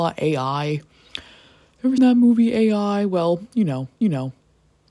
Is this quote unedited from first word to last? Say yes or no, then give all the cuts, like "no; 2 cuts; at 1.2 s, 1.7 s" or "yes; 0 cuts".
no; 2 cuts; at 2.0 s, 4.0 s